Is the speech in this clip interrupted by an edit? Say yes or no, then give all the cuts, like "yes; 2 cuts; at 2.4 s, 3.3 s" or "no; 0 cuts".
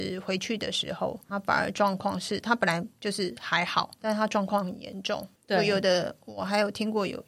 yes; 3 cuts; at 1.3 s, 4.0 s, 5.4 s